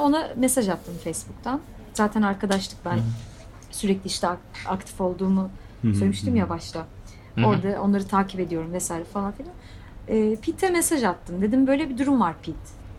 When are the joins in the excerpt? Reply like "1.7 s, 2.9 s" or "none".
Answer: 11.7 s